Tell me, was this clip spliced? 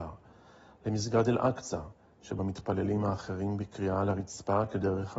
yes; 1 cut; at 2.4 s

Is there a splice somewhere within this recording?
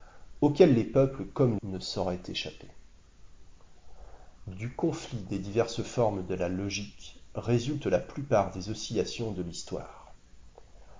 yes; 1 cut; at 1.6 s

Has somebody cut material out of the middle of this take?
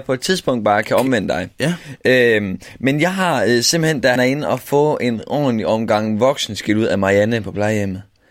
yes; 1 cut; at 4.2 s

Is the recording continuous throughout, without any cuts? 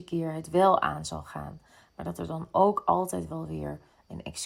yes; 0 cuts

